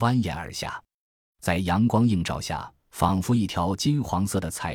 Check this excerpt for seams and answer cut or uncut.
cut